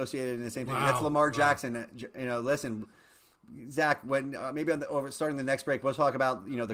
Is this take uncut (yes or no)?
yes